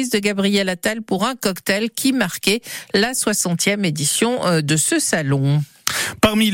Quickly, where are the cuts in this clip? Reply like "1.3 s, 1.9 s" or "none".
none